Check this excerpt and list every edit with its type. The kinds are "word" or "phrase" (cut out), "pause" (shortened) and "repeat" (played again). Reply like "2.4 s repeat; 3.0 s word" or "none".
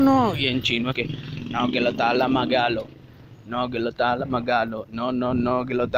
0.9 s word